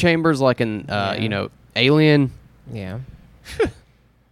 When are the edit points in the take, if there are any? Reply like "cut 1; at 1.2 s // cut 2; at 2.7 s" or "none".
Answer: none